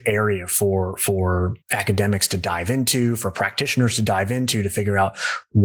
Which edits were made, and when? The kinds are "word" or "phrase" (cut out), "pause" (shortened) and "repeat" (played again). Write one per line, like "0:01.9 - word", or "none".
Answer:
0:01.6 - pause